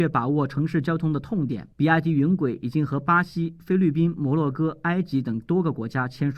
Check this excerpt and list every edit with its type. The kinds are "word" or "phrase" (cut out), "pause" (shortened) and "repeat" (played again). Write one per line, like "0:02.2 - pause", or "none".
0:01.7 - pause